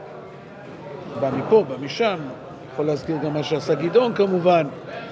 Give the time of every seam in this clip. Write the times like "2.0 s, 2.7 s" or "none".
none

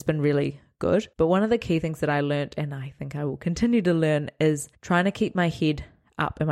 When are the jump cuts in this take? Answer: 1.1 s, 4.7 s

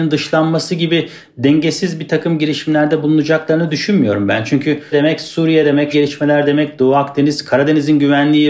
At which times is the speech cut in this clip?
4.9 s, 5.9 s

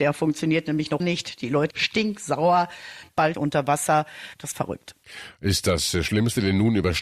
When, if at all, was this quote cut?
1.0 s, 1.7 s, 3.3 s, 4.5 s

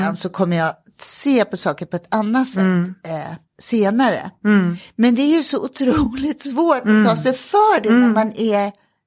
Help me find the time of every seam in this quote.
3.5 s

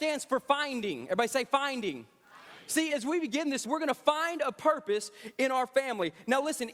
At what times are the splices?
2.9 s, 3.6 s

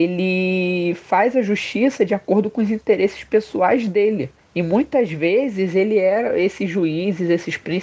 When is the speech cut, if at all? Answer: 4.4 s

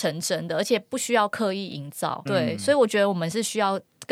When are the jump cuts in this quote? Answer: 2.3 s

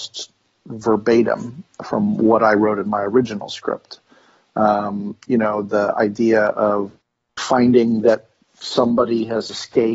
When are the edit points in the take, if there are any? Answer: none

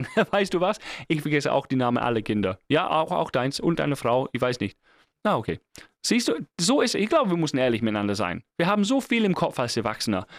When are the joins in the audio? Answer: none

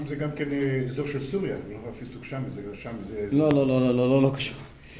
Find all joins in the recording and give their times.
2.8 s

